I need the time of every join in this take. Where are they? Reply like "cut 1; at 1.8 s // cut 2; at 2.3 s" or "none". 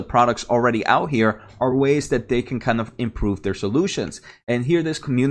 none

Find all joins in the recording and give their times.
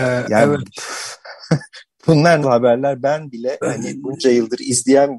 cut 1; at 2.4 s

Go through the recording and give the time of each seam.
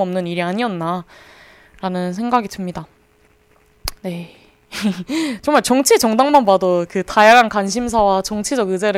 cut 1; at 4.0 s

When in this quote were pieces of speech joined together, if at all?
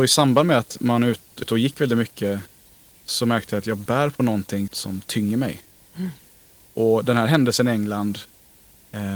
cut 1; at 1.4 s // cut 2; at 4.7 s

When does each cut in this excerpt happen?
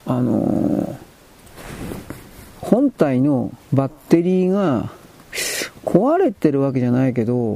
cut 1; at 2.5 s // cut 2; at 3.6 s

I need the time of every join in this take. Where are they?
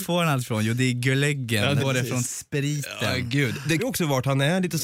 cut 1; at 1.8 s // cut 2; at 3.8 s

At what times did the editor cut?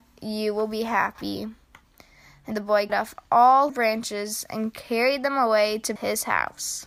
cut 1; at 2.5 s // cut 2; at 2.9 s // cut 3; at 3.7 s // cut 4; at 6.0 s

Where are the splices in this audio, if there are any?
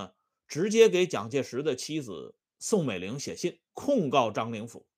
cut 1; at 3.7 s

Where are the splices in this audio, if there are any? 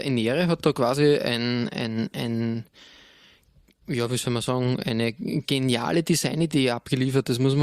none

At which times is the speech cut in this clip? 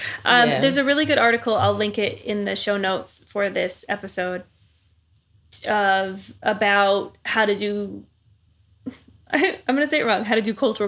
none

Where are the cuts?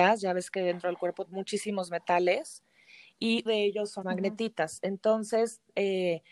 cut 1; at 1.2 s // cut 2; at 3.5 s // cut 3; at 4.0 s

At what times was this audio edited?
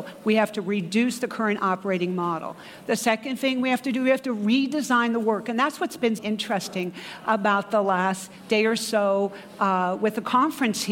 cut 1; at 6.2 s

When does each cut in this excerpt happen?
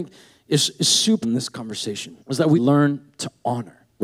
cut 1; at 1.2 s // cut 2; at 2.2 s // cut 3; at 2.5 s

